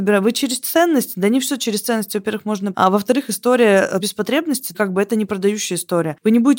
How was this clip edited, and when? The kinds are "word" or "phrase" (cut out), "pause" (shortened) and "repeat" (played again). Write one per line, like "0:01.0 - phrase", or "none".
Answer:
0:02.7 - word
0:04.0 - word
0:04.7 - word